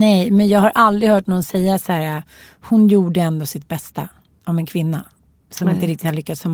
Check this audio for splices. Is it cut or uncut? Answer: uncut